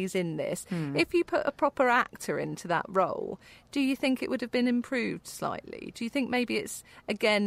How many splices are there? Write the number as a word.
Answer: zero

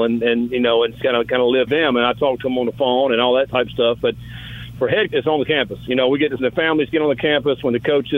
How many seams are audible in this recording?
four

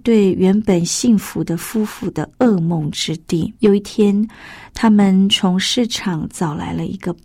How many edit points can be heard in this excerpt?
one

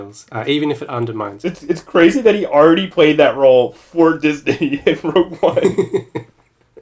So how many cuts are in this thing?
zero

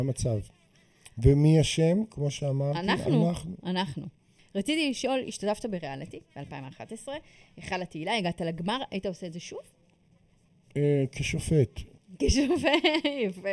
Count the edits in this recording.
zero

